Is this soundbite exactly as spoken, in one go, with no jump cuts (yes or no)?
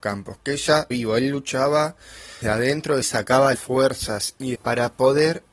no